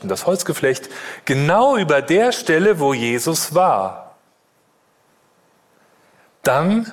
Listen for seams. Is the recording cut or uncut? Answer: uncut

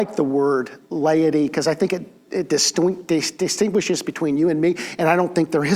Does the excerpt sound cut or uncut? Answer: uncut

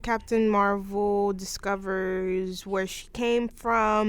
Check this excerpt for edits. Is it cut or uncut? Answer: uncut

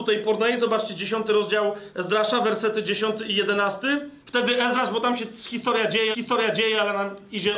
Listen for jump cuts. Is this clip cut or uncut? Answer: cut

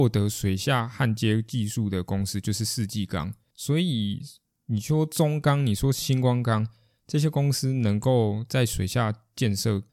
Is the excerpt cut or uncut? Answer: uncut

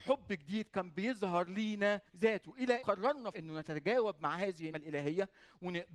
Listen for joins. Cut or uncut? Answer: cut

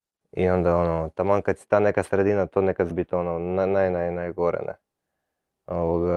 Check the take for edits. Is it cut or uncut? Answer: cut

